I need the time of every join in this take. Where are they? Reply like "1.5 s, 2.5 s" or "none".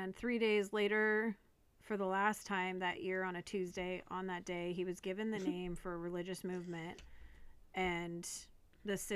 none